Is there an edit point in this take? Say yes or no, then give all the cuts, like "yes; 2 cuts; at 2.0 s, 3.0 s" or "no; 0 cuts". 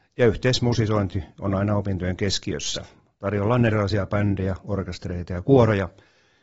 no; 0 cuts